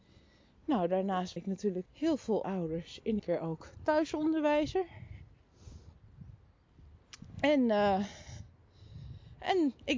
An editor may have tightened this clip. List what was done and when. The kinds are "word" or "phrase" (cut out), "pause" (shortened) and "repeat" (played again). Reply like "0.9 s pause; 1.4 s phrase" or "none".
1.4 s word; 1.9 s word; 2.4 s word; 3.2 s word